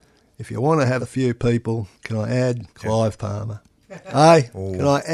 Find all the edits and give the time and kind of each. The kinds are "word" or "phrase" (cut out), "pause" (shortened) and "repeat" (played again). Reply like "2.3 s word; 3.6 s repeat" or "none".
1.0 s phrase; 1.9 s pause; 2.7 s pause